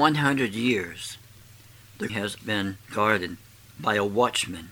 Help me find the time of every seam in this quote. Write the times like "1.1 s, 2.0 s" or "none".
2.1 s, 2.4 s